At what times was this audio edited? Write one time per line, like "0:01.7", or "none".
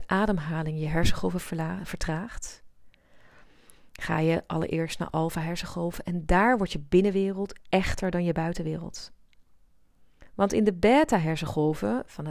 none